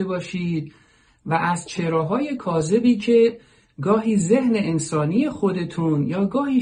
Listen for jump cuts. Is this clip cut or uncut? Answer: uncut